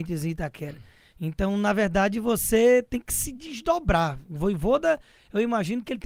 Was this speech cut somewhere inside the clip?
no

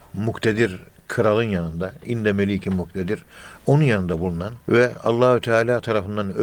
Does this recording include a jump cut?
yes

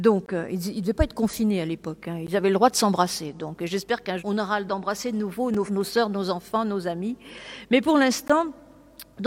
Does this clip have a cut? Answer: yes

